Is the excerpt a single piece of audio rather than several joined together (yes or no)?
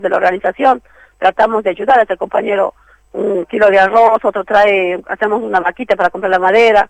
yes